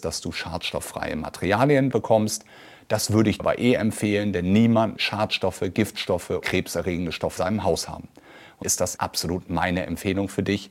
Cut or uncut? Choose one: cut